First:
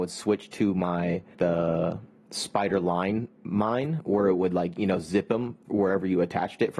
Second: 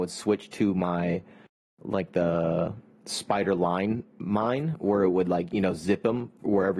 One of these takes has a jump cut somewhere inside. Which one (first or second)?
first